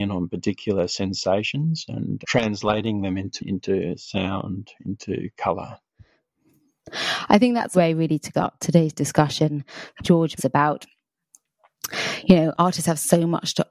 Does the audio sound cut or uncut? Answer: cut